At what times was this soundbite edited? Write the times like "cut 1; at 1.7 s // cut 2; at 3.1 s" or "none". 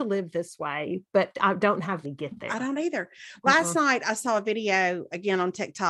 cut 1; at 1.3 s // cut 2; at 2.0 s